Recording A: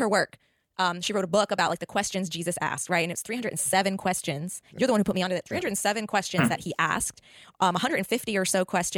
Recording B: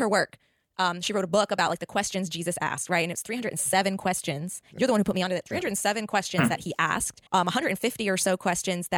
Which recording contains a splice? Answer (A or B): B